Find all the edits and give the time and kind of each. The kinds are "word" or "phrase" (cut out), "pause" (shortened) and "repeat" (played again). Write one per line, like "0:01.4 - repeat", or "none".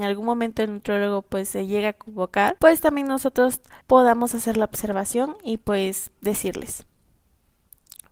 0:02.6 - pause
0:03.8 - pause